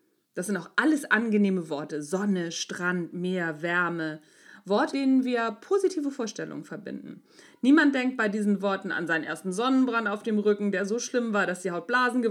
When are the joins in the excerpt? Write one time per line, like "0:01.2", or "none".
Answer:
0:04.9